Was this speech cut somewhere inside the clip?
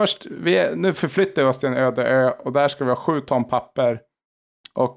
no; 0 cuts

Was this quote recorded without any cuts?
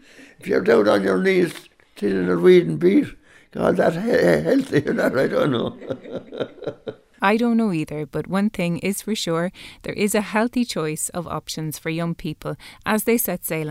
yes; 0 cuts

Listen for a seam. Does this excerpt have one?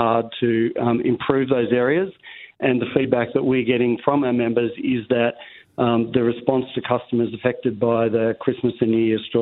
no; 0 cuts

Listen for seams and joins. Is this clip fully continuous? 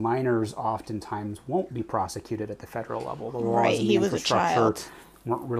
yes; 0 cuts

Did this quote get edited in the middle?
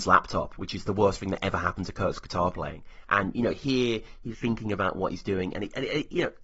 yes; 1 cut; at 4.3 s

